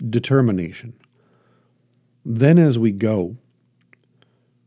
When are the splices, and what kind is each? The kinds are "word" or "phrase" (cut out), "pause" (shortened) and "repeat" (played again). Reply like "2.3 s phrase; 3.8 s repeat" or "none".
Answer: none